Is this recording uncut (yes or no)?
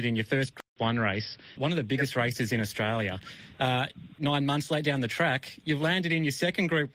no